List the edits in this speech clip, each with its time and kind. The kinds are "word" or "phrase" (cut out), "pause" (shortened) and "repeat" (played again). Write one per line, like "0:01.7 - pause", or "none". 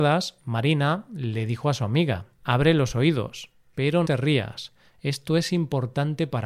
0:02.3 - pause
0:04.0 - word